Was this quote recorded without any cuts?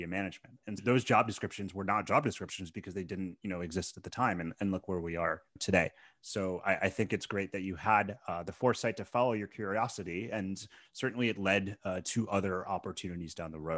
yes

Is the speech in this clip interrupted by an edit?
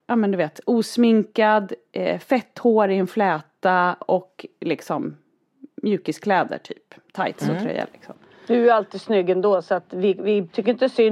no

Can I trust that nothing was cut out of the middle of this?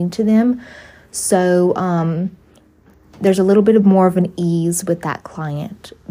yes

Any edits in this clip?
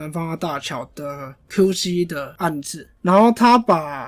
no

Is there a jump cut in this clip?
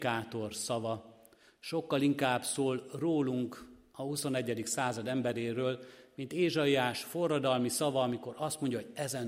no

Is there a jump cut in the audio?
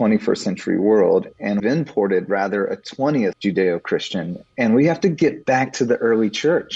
yes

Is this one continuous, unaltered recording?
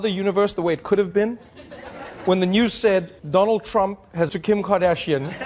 no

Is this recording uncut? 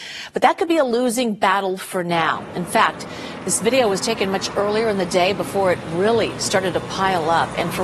yes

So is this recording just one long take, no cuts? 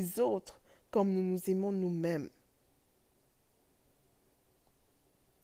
yes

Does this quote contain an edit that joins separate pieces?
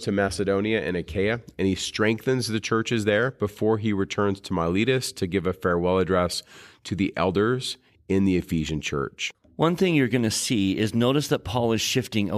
no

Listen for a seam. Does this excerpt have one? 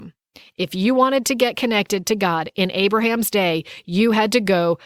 no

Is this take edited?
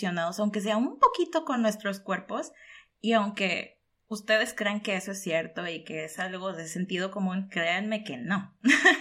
no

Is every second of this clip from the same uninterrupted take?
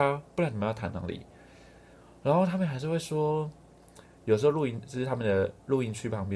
yes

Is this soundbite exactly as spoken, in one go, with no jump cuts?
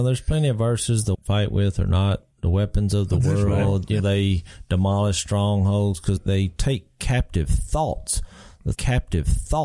no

